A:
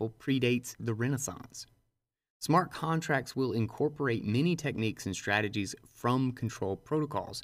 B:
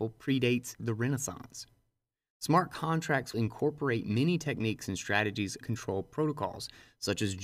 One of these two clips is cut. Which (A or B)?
B